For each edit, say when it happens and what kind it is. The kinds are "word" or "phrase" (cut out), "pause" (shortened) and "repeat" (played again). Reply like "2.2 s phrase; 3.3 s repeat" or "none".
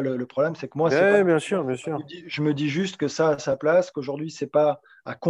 none